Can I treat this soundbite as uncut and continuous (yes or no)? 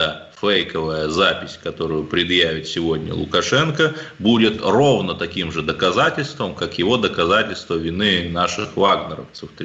yes